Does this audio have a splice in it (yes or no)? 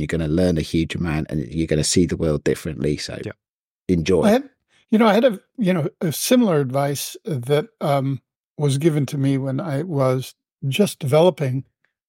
no